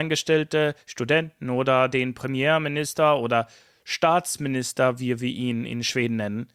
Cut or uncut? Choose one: uncut